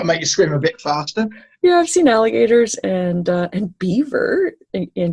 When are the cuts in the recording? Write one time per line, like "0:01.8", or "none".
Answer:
none

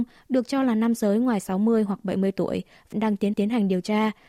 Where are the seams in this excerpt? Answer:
0:02.9
0:03.3

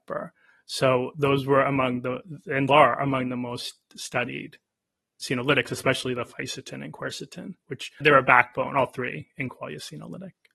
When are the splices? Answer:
0:02.7
0:08.0

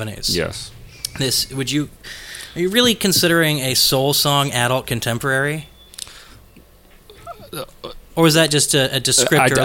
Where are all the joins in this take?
0:08.0

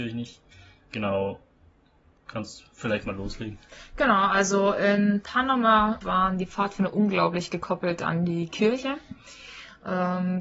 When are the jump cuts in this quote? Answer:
0:06.0

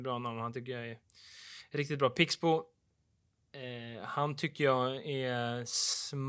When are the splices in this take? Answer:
none

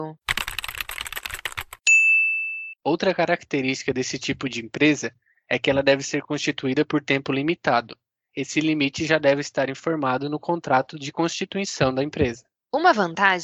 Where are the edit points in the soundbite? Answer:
none

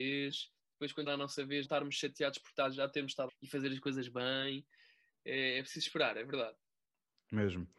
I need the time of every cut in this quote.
0:01.1
0:01.6
0:03.3

